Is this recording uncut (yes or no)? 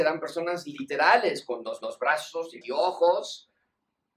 no